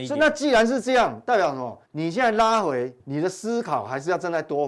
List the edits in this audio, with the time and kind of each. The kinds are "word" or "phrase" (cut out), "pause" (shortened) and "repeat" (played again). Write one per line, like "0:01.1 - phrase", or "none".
0:01.9 - pause
0:03.0 - word